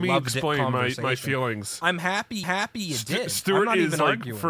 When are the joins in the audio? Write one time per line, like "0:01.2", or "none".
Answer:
0:02.4